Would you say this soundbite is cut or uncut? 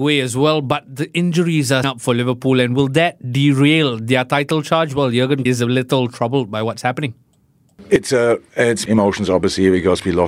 cut